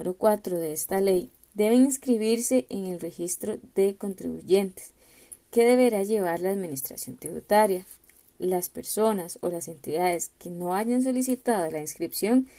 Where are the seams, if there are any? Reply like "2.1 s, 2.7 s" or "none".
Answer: 5.4 s